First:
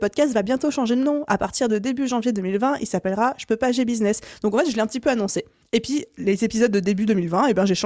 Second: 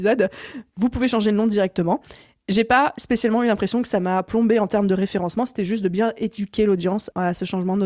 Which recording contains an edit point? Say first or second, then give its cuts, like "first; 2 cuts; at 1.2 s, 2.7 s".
first; 1 cut; at 5.6 s